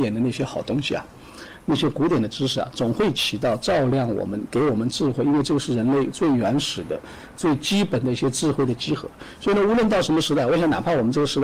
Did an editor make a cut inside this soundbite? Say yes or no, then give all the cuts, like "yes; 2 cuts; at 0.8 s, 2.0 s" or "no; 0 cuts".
no; 0 cuts